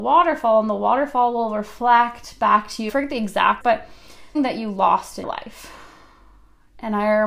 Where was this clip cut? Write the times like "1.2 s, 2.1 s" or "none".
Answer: 2.9 s, 3.6 s, 4.3 s, 5.2 s